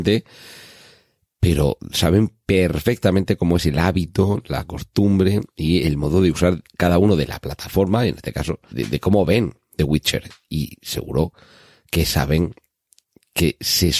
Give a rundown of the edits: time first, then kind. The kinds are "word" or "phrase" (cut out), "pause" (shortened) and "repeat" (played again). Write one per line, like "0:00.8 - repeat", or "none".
0:08.7 - word